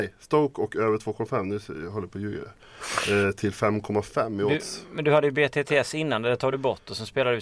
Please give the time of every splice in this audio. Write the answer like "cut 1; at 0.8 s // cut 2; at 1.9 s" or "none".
none